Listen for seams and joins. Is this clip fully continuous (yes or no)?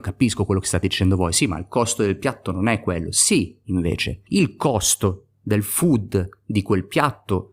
no